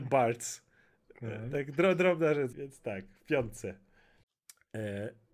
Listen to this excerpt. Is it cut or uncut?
cut